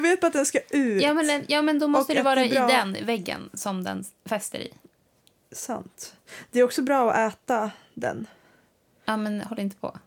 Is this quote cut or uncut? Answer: uncut